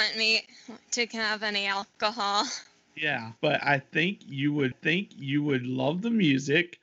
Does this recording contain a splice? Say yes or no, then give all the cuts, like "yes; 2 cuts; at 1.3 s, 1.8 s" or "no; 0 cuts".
yes; 2 cuts; at 3.4 s, 4.7 s